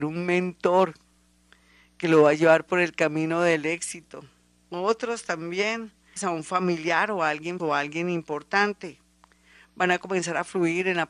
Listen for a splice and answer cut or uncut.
cut